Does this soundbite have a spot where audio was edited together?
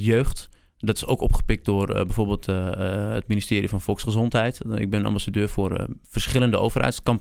no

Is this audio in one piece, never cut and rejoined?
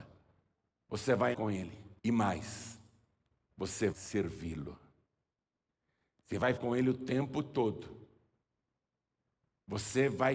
no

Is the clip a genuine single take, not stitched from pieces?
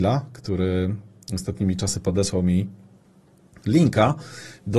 yes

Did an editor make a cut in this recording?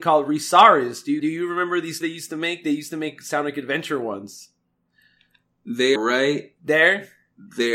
yes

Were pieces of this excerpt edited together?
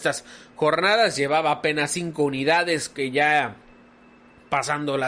no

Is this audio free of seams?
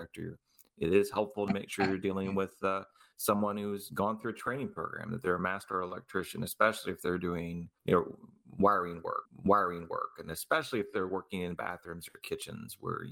no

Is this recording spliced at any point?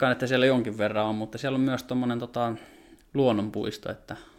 no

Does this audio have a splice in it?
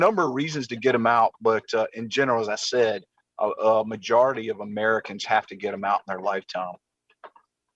no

